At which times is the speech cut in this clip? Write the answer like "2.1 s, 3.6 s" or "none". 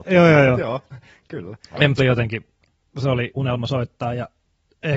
2.0 s, 3.4 s